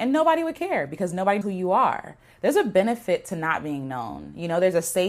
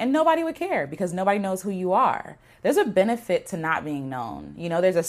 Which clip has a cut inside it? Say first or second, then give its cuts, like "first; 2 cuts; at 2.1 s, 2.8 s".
first; 1 cut; at 1.4 s